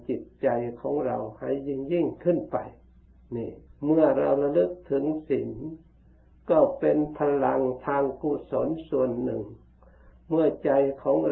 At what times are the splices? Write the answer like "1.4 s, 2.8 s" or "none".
3.7 s